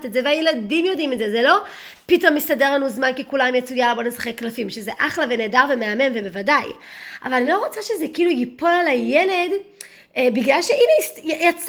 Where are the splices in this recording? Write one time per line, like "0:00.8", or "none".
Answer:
none